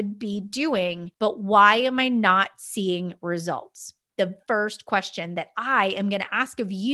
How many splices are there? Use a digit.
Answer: 2